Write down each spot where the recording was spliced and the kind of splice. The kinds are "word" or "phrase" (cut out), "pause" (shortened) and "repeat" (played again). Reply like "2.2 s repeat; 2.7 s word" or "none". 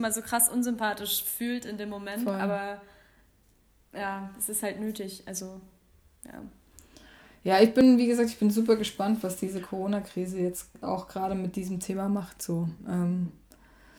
none

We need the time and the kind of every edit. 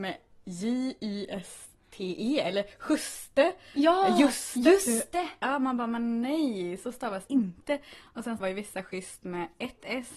7.3 s word; 8.4 s word

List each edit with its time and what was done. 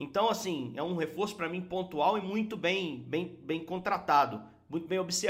none

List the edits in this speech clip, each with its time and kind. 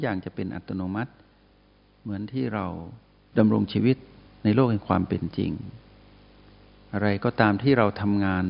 none

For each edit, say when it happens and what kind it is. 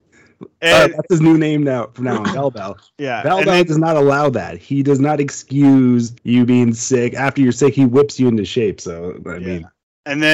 6.2 s pause

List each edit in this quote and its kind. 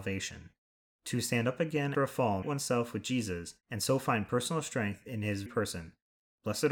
1.9 s word; 2.4 s phrase; 3.6 s pause; 5.5 s word

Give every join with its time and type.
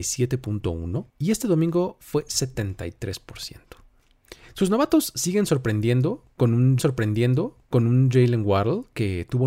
1.1 s pause; 6.8 s repeat

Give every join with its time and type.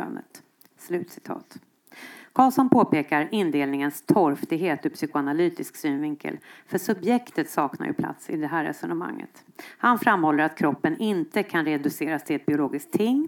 none

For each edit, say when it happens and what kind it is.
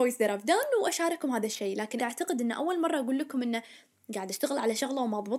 2.0 s word

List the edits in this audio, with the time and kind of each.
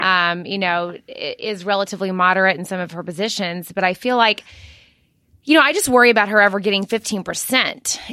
none

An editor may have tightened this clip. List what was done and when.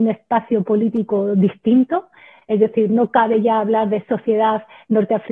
none

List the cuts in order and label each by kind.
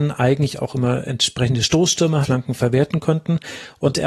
2.2 s phrase

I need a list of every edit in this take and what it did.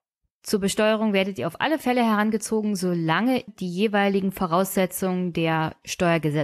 3.5 s word

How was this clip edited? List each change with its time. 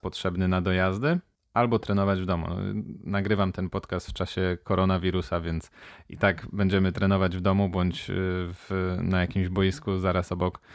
none

